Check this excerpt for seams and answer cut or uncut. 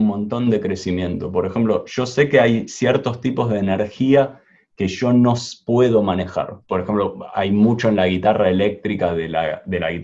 cut